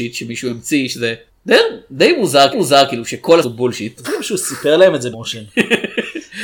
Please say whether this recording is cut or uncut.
cut